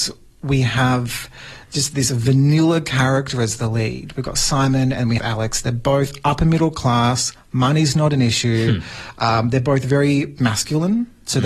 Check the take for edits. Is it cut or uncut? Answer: cut